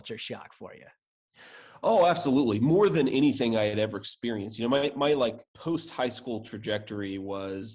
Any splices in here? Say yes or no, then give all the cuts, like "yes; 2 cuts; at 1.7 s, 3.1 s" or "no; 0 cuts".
yes; 1 cut; at 5.5 s